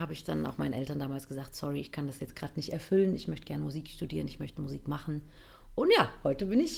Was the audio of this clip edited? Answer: no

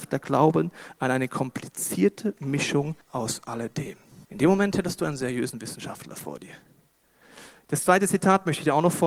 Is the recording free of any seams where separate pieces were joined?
no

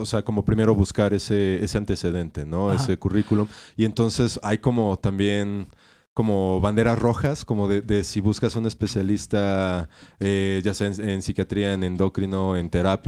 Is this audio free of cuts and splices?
yes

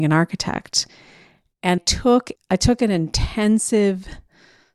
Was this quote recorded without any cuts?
no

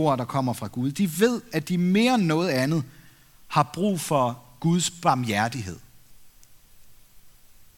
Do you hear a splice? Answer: no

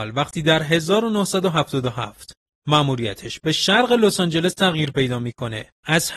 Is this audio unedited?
yes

